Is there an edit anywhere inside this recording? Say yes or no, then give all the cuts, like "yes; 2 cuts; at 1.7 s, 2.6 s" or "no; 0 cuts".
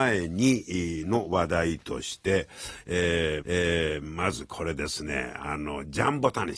yes; 1 cut; at 3.4 s